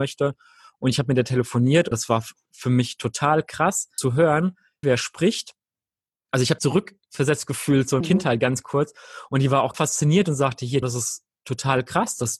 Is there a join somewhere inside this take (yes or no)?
yes